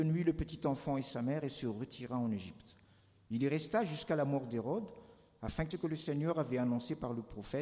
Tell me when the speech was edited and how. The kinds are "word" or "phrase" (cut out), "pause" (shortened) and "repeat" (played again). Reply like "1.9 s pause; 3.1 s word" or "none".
5.7 s word